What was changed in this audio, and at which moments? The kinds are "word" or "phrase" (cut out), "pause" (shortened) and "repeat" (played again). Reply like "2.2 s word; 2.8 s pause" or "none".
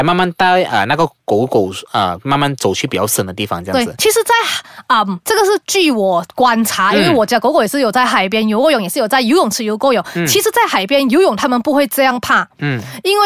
none